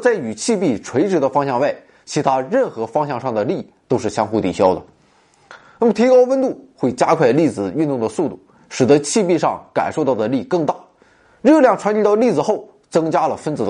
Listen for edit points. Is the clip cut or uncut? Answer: uncut